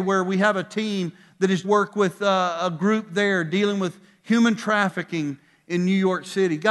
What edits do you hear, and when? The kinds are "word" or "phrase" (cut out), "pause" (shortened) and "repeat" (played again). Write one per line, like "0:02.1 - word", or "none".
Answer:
0:01.6 - phrase